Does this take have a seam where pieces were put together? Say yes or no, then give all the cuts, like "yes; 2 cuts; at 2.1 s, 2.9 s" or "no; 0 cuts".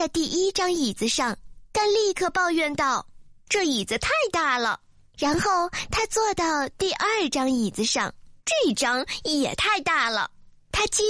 yes; 1 cut; at 8.4 s